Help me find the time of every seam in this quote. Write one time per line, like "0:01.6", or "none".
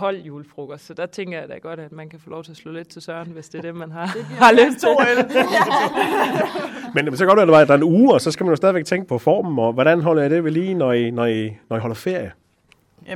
0:09.1